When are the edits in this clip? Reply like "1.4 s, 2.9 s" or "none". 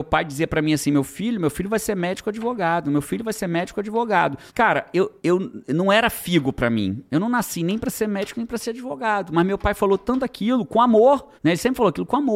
4.5 s, 5.2 s, 11.4 s